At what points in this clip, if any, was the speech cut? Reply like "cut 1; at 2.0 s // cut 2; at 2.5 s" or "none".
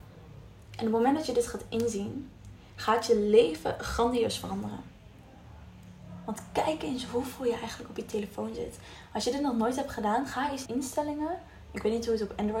cut 1; at 10.7 s